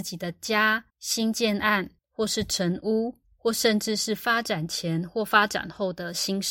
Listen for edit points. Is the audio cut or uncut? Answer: cut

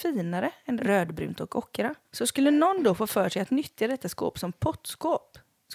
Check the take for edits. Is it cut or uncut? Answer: cut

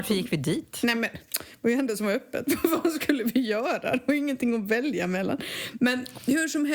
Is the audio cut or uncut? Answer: uncut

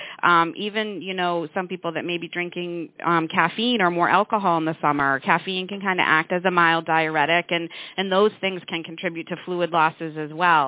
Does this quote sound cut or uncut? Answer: cut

